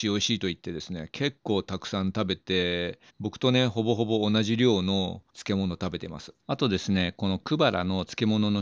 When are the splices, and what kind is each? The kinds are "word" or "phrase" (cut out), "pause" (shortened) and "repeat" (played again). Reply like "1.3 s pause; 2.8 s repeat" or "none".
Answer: 3.1 s pause; 5.3 s pause; 6.4 s pause